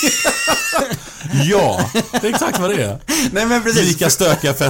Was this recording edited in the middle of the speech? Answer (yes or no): no